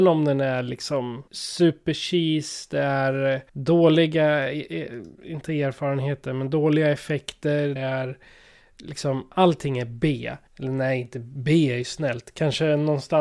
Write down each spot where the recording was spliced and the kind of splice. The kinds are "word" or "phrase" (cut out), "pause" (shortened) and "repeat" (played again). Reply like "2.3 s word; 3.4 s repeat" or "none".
1.3 s pause; 3.5 s pause; 7.8 s word; 10.5 s pause

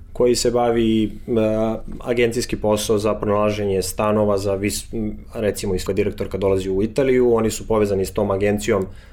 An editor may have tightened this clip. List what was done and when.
5.9 s word

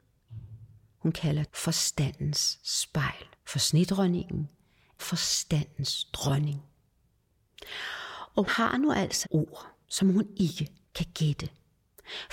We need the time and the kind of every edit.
1.5 s word; 3.3 s pause; 5.0 s word; 8.5 s word; 9.2 s word; 9.8 s pause; 10.8 s pause

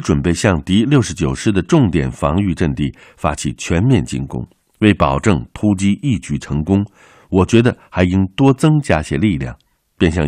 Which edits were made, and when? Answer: 4.6 s pause

